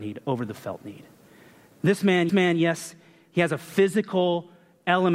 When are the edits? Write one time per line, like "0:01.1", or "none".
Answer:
0:02.3